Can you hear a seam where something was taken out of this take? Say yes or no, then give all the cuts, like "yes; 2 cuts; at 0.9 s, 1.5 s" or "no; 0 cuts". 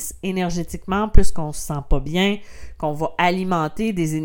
no; 0 cuts